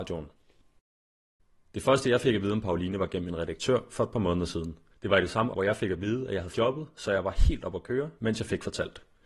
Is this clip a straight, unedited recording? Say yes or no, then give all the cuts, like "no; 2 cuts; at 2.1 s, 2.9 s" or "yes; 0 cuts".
no; 4 cuts; at 4.9 s, 5.5 s, 6.5 s, 8.2 s